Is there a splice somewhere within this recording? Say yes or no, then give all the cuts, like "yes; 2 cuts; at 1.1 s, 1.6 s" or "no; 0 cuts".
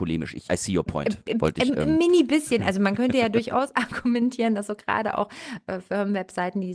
no; 0 cuts